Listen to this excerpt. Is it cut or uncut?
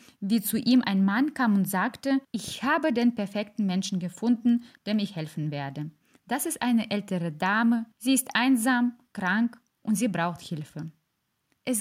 cut